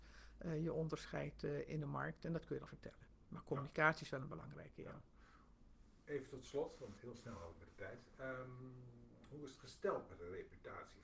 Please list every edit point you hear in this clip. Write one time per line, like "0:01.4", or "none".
0:02.7
0:07.0